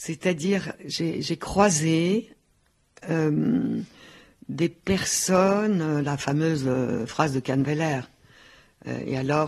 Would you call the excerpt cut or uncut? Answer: uncut